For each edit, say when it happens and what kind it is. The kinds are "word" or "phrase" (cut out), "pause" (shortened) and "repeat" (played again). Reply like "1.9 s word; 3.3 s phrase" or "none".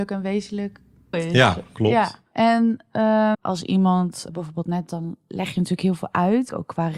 1.1 s word; 3.3 s word; 4.3 s word; 4.9 s word